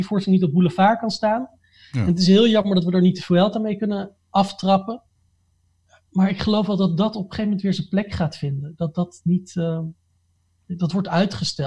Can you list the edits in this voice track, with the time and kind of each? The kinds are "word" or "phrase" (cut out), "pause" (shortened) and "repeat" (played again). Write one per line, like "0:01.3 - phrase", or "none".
none